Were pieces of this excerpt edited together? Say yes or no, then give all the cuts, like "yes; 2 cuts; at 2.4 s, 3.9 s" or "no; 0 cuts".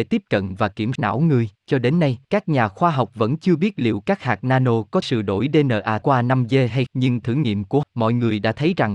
yes; 8 cuts; at 1.0 s, 1.6 s, 2.2 s, 5.0 s, 6.0 s, 6.9 s, 7.2 s, 7.8 s